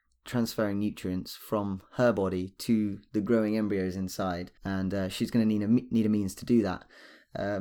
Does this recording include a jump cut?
yes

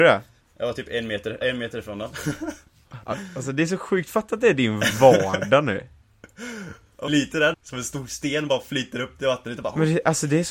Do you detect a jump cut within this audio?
yes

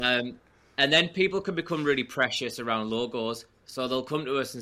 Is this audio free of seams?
yes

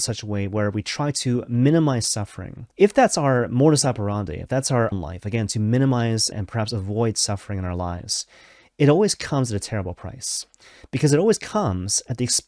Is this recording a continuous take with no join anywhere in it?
no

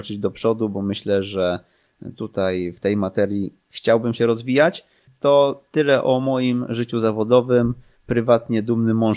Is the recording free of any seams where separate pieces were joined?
yes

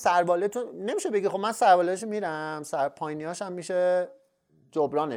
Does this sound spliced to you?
no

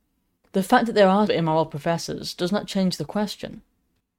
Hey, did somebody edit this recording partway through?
yes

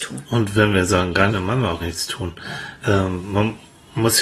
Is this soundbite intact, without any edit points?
no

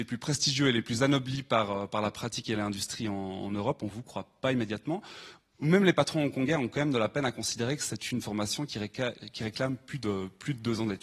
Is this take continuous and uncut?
yes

